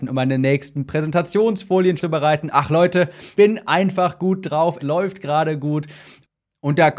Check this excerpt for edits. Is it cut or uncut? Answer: cut